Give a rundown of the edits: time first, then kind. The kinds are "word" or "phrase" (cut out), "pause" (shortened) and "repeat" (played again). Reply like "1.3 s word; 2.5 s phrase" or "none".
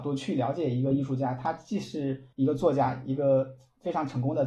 2.3 s pause